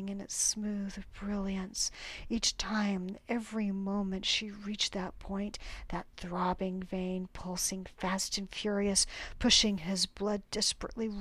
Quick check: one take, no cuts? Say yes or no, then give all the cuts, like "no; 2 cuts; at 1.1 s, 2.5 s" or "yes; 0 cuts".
yes; 0 cuts